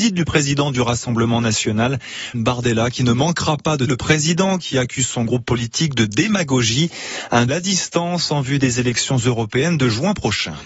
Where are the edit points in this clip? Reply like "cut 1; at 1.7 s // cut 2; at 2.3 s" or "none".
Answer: cut 1; at 2.3 s // cut 2; at 3.9 s // cut 3; at 7.5 s